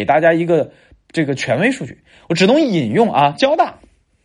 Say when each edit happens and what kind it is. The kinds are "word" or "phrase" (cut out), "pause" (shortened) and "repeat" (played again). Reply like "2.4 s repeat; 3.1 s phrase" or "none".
none